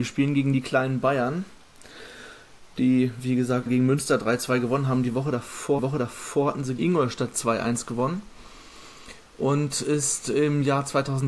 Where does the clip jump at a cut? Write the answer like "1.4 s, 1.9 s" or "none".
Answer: 3.7 s, 5.8 s, 6.8 s